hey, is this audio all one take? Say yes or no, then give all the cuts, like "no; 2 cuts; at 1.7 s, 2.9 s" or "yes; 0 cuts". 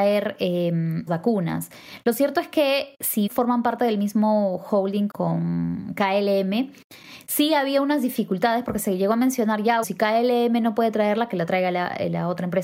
no; 4 cuts; at 1.1 s, 3.3 s, 5.1 s, 9.8 s